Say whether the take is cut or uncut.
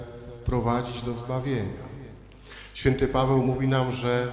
uncut